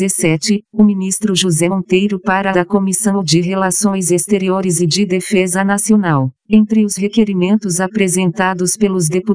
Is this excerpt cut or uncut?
cut